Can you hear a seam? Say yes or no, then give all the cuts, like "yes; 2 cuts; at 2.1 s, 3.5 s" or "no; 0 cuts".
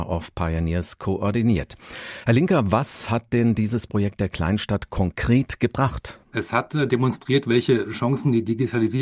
yes; 1 cut; at 6.2 s